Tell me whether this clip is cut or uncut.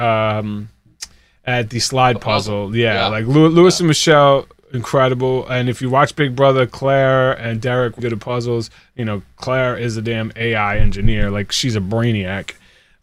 cut